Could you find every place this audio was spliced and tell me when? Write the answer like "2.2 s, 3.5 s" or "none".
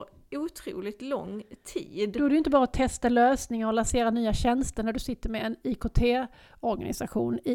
none